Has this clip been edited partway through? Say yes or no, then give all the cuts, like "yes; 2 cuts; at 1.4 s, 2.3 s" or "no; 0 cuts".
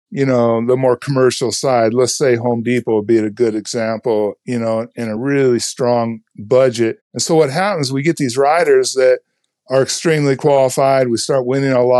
no; 0 cuts